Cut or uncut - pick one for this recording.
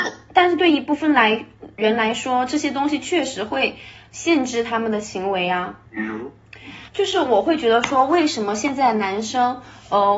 cut